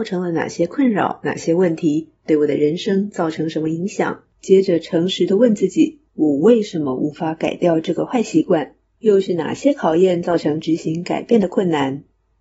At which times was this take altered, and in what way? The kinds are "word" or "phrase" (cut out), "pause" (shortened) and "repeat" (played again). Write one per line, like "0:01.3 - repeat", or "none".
0:04.3 - pause
0:06.1 - pause